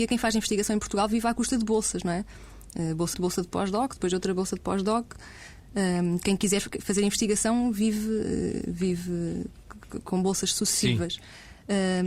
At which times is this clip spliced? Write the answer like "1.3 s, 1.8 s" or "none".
3.1 s

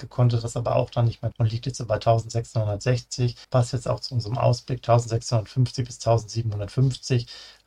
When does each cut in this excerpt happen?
1.3 s, 3.4 s

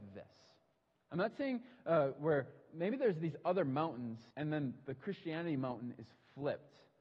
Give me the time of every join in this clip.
4.3 s

